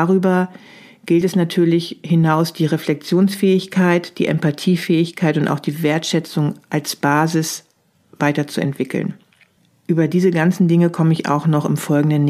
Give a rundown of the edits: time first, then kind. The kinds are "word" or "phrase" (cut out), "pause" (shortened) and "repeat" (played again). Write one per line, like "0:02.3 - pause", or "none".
none